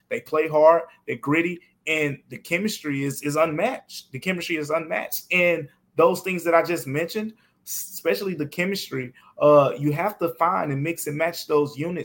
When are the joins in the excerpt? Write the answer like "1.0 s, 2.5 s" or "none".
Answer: none

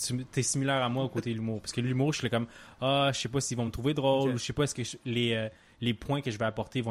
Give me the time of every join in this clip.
none

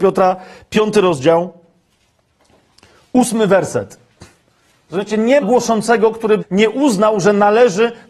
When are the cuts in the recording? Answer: 5.4 s, 6.4 s

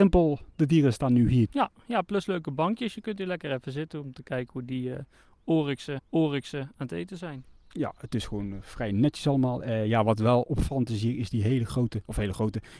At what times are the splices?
6.0 s

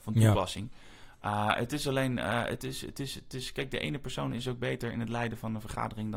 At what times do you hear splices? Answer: none

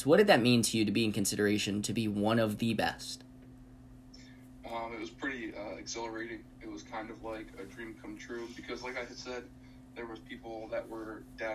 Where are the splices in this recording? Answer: none

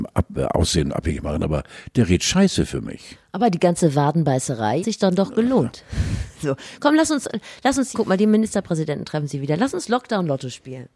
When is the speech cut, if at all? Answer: 4.8 s, 7.9 s

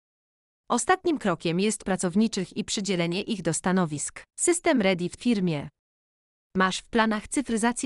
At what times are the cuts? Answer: 1.8 s, 4.3 s, 5.2 s

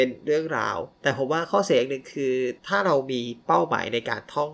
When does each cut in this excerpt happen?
0.9 s, 2.6 s

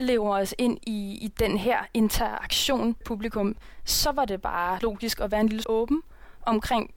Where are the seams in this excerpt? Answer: 3.0 s, 4.8 s, 5.6 s

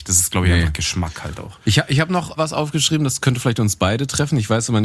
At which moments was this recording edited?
1.6 s, 2.4 s

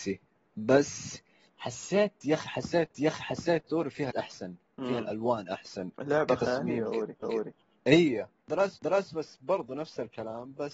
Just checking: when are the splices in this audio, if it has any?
2.9 s, 4.1 s, 5.9 s, 7.2 s, 8.8 s

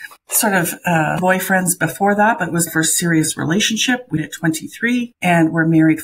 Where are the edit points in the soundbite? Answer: 1.2 s, 2.7 s, 4.2 s

